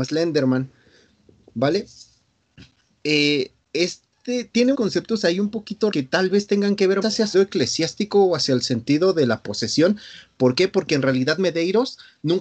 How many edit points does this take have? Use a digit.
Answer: 5